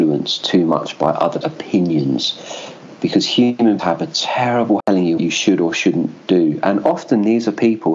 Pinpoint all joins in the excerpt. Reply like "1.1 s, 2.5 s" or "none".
1.4 s, 3.8 s, 4.8 s, 5.2 s